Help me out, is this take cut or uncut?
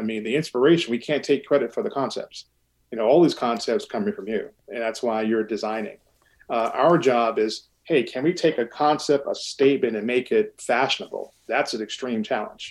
uncut